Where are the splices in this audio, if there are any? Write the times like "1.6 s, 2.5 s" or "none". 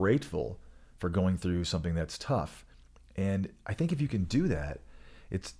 none